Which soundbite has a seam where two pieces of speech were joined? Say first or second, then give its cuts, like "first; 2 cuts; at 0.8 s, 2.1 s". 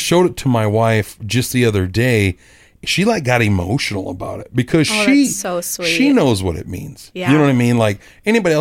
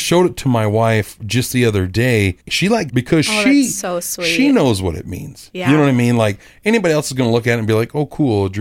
second; 2 cuts; at 2.4 s, 2.9 s